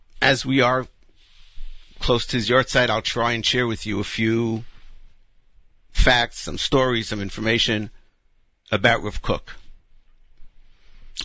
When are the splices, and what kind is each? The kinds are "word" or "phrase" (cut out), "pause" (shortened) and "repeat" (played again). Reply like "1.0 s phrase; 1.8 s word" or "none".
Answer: none